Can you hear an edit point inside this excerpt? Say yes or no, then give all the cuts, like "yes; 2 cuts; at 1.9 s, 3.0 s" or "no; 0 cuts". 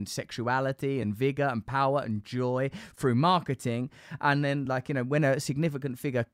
no; 0 cuts